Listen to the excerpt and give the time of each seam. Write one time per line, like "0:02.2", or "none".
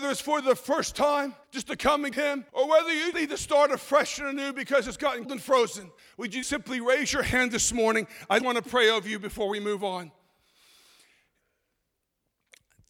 0:01.4
0:02.1
0:02.5
0:03.1
0:05.2
0:06.0
0:06.4
0:08.4